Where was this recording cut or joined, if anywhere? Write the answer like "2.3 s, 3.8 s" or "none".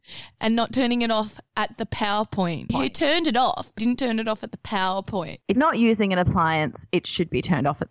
3.8 s, 5.6 s